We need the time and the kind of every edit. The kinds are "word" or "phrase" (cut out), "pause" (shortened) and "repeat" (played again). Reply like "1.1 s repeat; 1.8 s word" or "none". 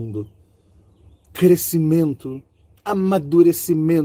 none